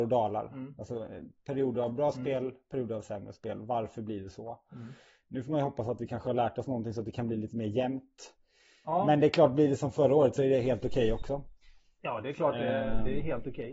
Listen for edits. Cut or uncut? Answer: uncut